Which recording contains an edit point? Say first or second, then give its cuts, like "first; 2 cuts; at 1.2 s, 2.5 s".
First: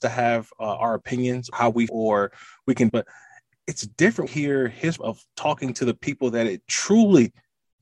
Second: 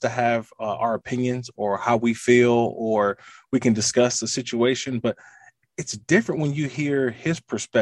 first; 5 cuts; at 1.5 s, 1.9 s, 2.9 s, 4.3 s, 5.0 s